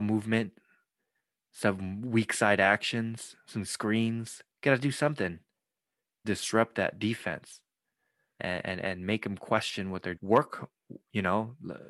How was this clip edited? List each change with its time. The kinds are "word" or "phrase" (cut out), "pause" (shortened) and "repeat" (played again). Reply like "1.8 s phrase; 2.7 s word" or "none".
4.5 s pause; 6.2 s word; 8.4 s word; 10.2 s phrase